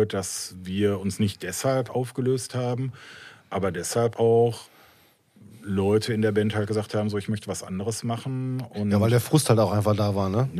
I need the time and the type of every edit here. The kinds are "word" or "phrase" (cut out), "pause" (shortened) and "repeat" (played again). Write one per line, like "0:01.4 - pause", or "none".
0:01.9 - word
0:04.1 - word